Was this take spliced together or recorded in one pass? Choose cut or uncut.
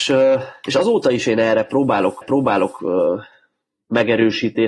cut